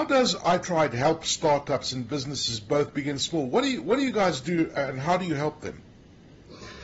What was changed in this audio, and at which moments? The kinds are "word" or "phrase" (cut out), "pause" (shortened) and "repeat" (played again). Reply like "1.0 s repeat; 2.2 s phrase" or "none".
none